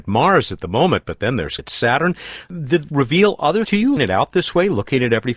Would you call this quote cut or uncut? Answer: cut